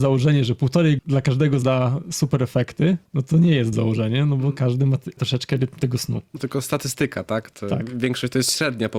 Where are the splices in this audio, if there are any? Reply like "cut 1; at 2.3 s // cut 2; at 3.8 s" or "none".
cut 1; at 1.0 s // cut 2; at 1.6 s // cut 3; at 3.1 s // cut 4; at 3.7 s // cut 5; at 5.2 s // cut 6; at 6.4 s